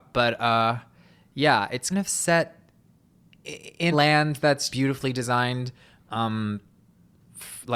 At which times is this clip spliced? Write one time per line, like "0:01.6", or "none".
0:01.9
0:03.9
0:04.7